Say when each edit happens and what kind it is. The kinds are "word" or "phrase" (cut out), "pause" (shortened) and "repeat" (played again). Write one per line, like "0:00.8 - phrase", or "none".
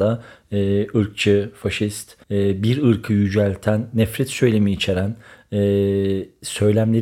0:02.2 - pause